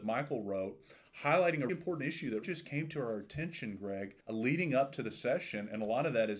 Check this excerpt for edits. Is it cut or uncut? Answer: cut